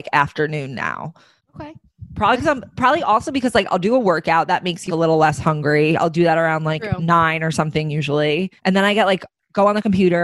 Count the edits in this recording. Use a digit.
3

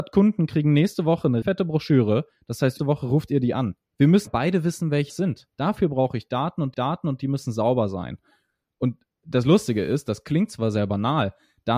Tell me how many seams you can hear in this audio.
8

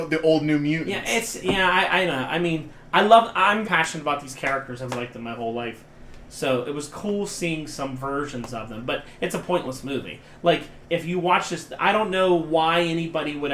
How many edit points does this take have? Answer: 3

